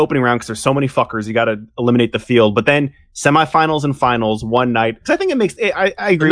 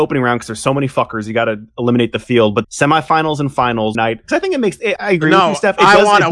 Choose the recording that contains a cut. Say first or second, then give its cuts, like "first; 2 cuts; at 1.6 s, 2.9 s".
second; 3 cuts; at 2.6 s, 3.9 s, 5.0 s